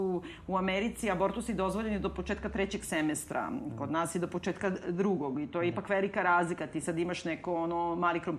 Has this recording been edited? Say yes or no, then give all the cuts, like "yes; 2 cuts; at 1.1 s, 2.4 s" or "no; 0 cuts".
no; 0 cuts